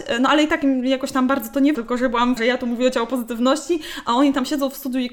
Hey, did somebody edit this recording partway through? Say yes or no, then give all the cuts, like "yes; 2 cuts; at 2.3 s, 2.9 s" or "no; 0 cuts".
yes; 2 cuts; at 1.7 s, 2.4 s